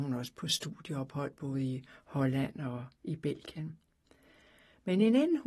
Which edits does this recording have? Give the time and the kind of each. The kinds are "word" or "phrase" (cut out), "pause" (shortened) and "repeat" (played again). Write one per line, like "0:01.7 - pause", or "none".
none